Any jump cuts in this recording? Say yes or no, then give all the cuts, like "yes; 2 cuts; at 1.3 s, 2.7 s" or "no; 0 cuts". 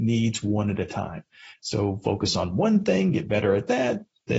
no; 0 cuts